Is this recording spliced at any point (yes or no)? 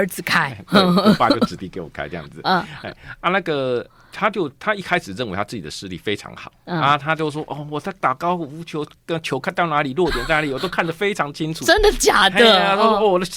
no